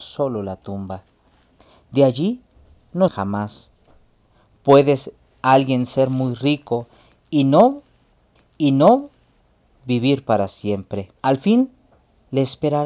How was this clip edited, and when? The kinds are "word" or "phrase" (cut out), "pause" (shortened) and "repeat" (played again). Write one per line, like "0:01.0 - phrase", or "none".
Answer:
0:03.1 - word
0:08.4 - repeat
0:11.2 - pause